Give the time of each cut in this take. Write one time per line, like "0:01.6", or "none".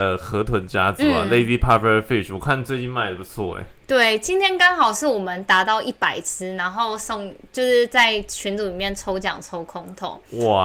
none